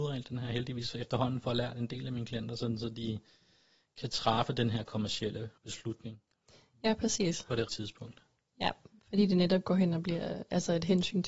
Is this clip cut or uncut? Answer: cut